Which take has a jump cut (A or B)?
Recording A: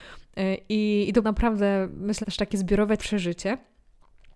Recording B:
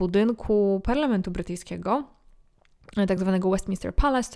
A